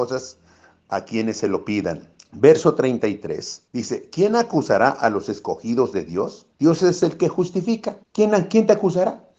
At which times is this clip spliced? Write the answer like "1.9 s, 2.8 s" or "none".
2.2 s, 3.7 s, 6.5 s, 8.0 s